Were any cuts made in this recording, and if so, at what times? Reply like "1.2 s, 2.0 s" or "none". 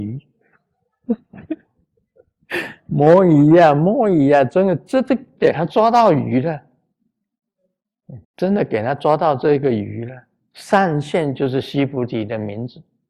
8.2 s